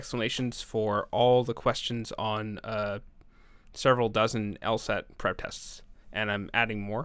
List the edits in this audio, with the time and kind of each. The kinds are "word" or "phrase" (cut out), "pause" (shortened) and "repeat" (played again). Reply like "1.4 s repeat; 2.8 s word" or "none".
6.0 s pause

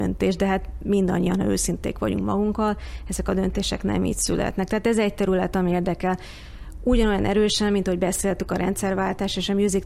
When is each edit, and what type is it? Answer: none

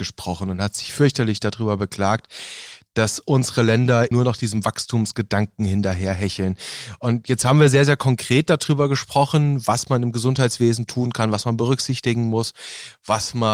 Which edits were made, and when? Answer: 4.1 s word

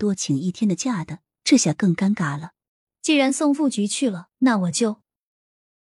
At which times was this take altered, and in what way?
2.7 s pause; 4.3 s pause

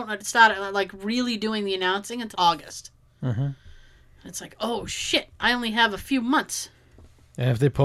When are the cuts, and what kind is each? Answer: 2.3 s word

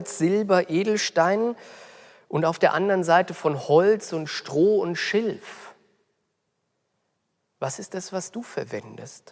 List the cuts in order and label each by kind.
none

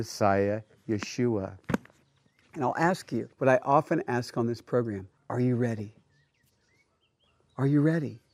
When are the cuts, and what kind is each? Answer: 3.3 s pause; 5.2 s pause

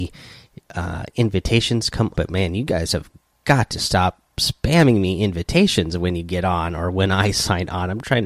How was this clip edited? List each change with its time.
2.2 s phrase

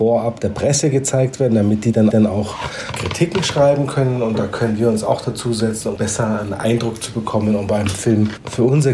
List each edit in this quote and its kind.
2.1 s repeat; 6.0 s word

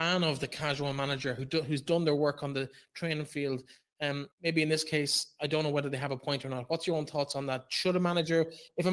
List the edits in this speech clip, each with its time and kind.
4.3 s pause

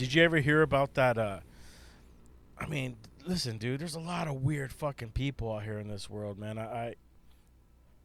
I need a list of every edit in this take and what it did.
none

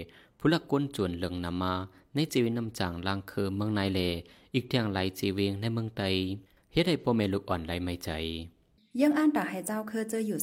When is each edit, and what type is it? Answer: none

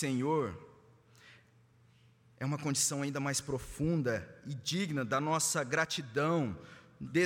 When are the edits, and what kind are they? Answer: none

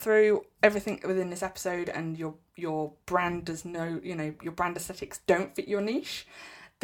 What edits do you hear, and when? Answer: none

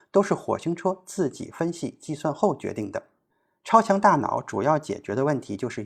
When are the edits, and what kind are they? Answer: none

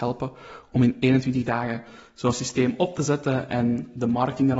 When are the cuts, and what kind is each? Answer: none

